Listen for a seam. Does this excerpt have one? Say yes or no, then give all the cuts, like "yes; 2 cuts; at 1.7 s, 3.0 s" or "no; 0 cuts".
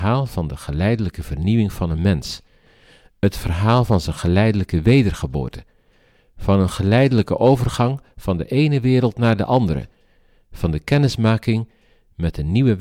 no; 0 cuts